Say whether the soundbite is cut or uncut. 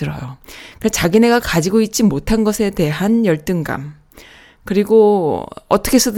uncut